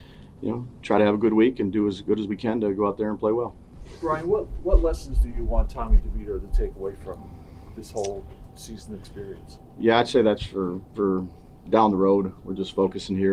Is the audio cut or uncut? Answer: uncut